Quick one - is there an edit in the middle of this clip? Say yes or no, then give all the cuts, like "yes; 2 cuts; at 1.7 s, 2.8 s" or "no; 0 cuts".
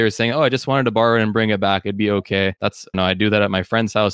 yes; 2 cuts; at 2.6 s, 2.9 s